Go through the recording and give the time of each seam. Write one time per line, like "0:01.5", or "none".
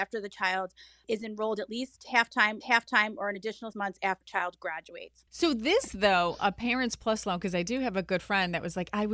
0:01.0
0:02.6
0:03.7
0:04.2
0:05.3